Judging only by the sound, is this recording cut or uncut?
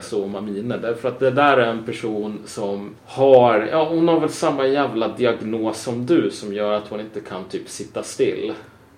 cut